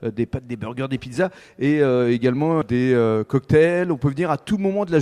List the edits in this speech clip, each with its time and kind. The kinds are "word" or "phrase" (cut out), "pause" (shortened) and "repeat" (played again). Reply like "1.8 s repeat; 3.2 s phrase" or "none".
2.6 s word